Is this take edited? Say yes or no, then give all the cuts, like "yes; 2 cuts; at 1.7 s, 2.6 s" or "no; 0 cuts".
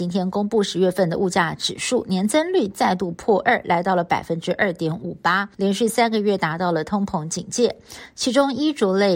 yes; 1 cut; at 5.5 s